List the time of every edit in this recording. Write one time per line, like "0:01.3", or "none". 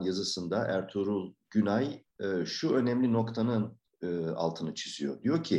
none

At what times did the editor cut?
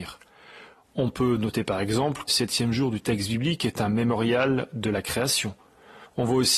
0:02.3

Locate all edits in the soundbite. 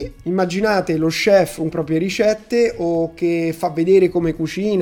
0:01.7

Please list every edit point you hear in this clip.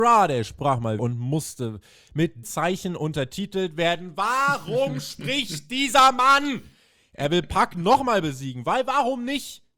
0:01.0
0:02.4

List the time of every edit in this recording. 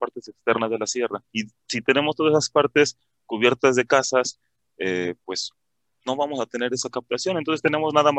0:01.3

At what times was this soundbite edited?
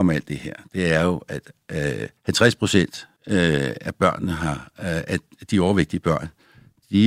0:02.2
0:03.2

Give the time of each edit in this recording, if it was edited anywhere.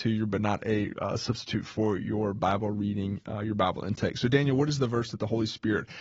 none

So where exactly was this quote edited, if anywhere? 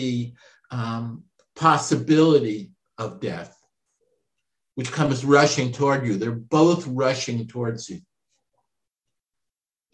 none

